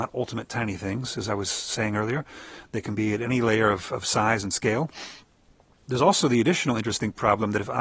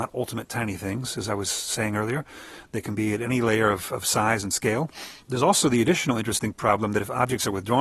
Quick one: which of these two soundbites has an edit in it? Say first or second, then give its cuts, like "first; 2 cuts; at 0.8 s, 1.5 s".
second; 1 cut; at 5.2 s